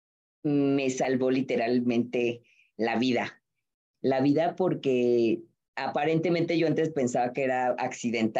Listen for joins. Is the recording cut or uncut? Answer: uncut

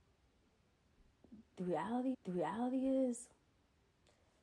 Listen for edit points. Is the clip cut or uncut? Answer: cut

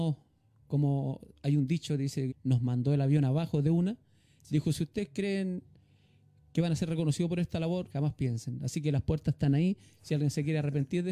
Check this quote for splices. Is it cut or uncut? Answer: cut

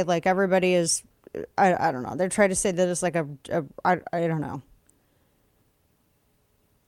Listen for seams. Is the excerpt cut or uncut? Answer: uncut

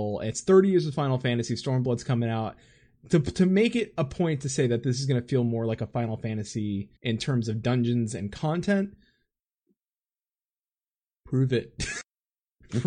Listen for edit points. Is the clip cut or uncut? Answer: cut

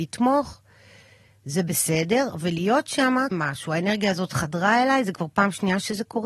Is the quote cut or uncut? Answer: cut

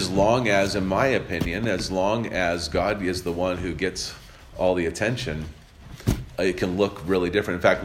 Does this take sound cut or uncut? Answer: uncut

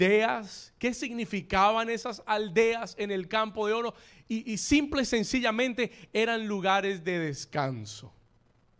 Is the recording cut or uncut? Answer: uncut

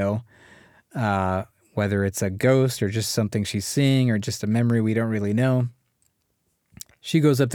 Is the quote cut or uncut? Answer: uncut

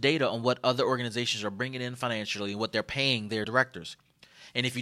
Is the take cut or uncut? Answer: cut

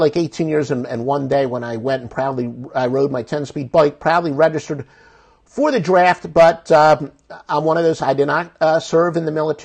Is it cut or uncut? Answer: uncut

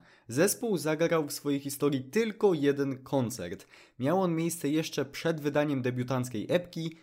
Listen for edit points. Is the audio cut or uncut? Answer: uncut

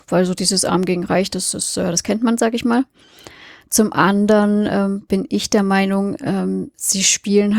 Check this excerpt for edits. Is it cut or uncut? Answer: uncut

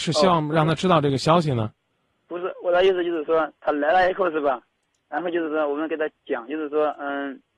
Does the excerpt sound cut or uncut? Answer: uncut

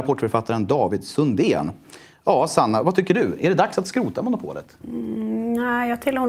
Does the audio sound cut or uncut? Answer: cut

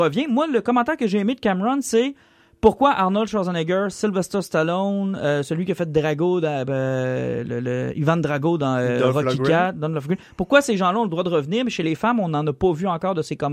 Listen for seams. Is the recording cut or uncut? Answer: uncut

